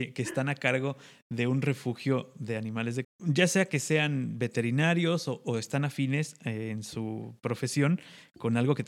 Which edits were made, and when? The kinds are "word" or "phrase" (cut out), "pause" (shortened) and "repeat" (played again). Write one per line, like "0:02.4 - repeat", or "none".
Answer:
0:03.0 - word